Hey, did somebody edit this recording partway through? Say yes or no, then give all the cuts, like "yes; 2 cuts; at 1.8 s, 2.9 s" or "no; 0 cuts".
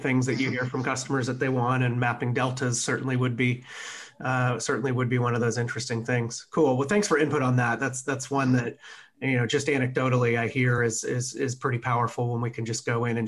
no; 0 cuts